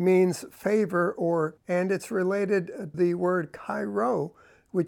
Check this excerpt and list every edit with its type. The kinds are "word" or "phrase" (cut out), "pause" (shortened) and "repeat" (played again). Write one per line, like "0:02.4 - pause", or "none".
0:01.6 - word
0:02.9 - word